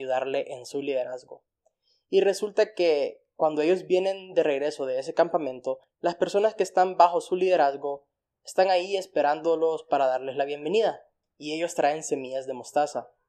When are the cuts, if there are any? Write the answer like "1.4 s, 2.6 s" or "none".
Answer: none